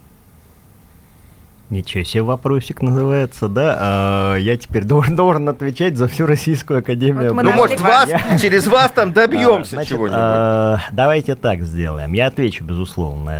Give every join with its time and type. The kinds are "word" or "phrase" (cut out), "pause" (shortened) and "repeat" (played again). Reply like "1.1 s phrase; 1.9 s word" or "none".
7.8 s phrase